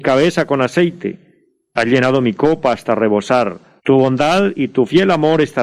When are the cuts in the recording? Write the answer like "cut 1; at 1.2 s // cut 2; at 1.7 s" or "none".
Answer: cut 1; at 3.8 s